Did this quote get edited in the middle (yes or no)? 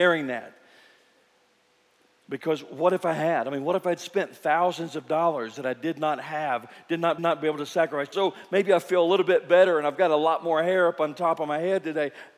yes